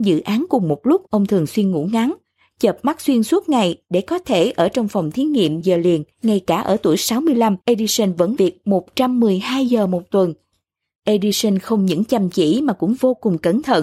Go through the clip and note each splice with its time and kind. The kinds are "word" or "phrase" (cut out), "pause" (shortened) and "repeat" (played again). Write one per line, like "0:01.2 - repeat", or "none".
0:01.1 - pause
0:05.6 - word
0:06.1 - pause
0:07.6 - pause
0:08.4 - word